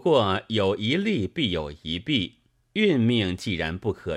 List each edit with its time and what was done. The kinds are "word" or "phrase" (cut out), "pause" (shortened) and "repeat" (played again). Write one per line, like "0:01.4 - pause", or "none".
0:02.6 - pause